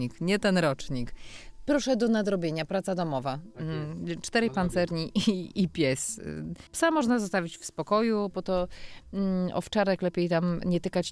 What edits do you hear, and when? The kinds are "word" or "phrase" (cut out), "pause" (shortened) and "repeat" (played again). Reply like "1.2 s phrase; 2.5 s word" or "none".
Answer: 6.7 s pause